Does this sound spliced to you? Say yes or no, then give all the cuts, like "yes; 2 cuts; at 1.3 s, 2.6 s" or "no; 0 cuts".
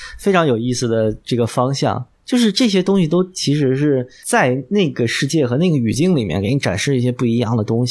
yes; 1 cut; at 2.1 s